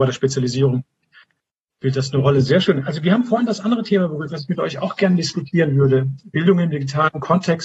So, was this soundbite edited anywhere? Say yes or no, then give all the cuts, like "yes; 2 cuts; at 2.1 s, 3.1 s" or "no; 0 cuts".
no; 0 cuts